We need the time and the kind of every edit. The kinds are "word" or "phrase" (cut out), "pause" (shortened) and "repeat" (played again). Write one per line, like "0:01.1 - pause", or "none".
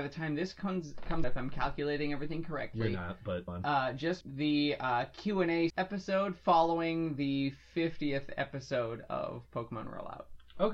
0:01.2 - word
0:03.5 - word
0:04.2 - word
0:05.7 - word